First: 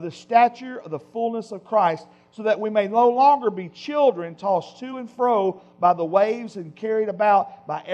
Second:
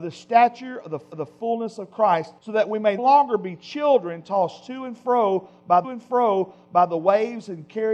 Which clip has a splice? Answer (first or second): second